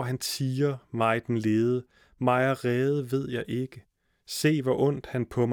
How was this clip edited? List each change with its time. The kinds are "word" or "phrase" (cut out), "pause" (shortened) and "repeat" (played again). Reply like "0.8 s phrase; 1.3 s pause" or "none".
none